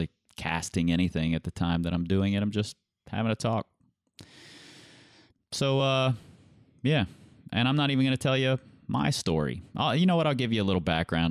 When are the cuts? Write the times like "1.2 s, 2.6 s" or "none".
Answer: none